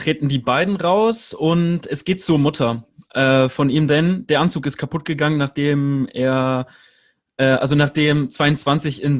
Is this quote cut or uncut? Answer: uncut